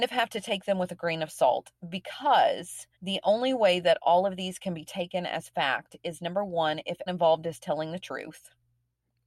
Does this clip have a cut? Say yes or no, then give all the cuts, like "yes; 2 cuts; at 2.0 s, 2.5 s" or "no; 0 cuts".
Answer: yes; 2 cuts; at 2.9 s, 7.1 s